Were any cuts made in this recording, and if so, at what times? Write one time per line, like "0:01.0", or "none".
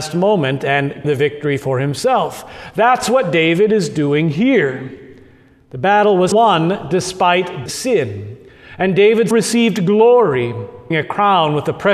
0:01.0
0:06.3
0:07.7
0:09.3
0:10.9